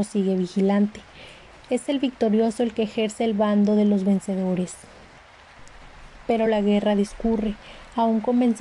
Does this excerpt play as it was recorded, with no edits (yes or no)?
yes